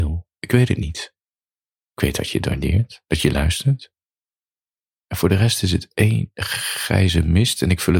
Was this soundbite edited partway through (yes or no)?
no